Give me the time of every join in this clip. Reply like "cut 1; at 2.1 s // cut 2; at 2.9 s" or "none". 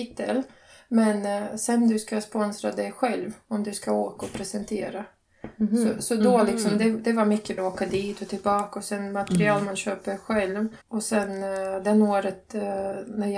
cut 1; at 7.6 s // cut 2; at 10.8 s